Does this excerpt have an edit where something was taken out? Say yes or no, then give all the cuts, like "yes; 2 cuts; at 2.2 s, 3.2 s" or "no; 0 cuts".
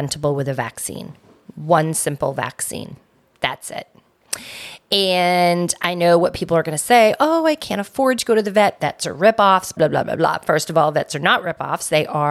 yes; 1 cut; at 9.8 s